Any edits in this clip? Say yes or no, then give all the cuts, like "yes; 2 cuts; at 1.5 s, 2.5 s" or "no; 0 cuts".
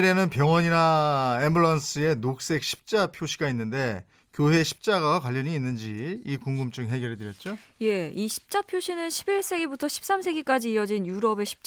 no; 0 cuts